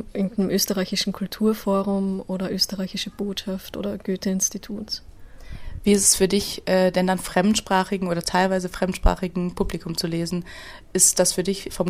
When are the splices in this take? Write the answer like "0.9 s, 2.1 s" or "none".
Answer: 7.2 s, 8.2 s